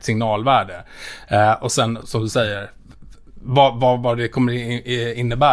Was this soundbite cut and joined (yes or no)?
yes